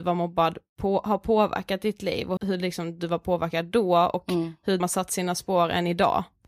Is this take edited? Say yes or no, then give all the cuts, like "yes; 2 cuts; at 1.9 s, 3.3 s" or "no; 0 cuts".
yes; 2 cuts; at 2.4 s, 4.8 s